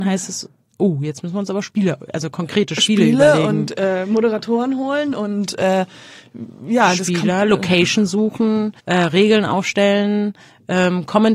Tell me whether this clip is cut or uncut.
cut